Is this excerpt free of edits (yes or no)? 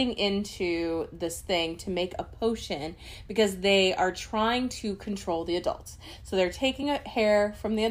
yes